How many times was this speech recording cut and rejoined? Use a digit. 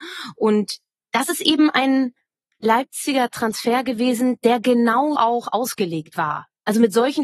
1